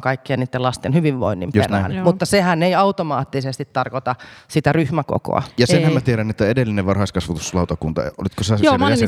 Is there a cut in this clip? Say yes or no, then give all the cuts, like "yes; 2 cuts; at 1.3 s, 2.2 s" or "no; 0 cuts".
no; 0 cuts